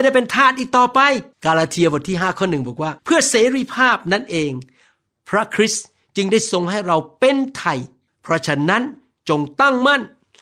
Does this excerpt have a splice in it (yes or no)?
yes